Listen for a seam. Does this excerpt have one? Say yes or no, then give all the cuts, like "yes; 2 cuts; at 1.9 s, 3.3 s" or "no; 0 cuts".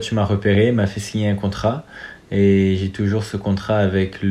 no; 0 cuts